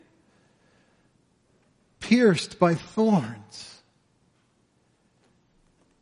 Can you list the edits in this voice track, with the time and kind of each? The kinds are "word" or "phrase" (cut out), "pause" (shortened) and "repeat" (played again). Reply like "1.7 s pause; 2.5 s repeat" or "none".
none